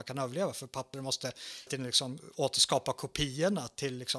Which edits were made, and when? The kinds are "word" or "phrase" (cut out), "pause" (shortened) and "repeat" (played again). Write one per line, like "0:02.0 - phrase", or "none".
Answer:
0:00.9 - phrase
0:01.7 - word